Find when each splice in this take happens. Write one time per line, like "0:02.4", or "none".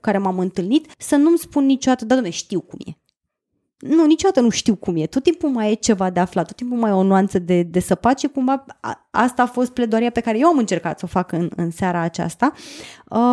0:00.9